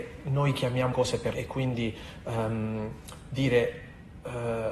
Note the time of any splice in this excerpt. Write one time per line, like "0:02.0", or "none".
0:00.9
0:01.3